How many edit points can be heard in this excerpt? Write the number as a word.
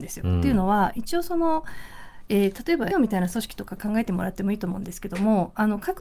one